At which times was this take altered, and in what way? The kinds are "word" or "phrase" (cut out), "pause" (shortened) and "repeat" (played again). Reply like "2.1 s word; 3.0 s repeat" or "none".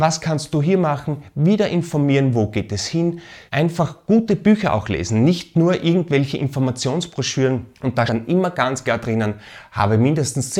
3.5 s pause; 7.7 s pause; 8.1 s word